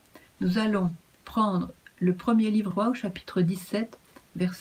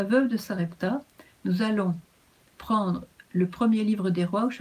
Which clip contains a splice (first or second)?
first